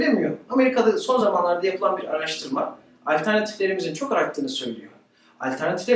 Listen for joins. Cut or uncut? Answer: uncut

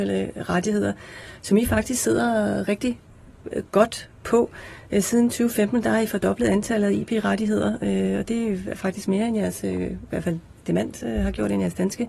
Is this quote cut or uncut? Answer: uncut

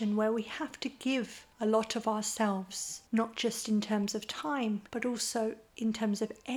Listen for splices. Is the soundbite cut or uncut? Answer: cut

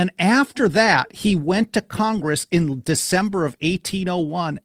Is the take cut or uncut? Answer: uncut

